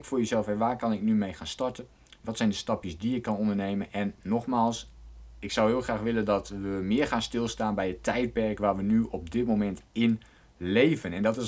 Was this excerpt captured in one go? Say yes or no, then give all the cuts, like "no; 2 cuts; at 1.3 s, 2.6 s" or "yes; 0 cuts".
yes; 0 cuts